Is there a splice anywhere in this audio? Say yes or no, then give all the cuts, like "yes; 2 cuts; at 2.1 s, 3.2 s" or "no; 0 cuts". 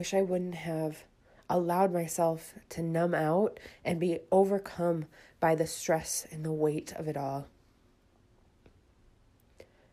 no; 0 cuts